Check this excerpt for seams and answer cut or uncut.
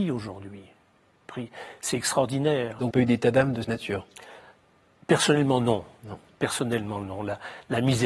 cut